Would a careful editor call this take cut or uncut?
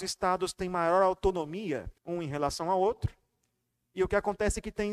cut